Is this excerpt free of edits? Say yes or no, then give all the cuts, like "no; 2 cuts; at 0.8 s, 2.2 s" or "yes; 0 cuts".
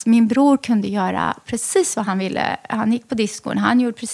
yes; 0 cuts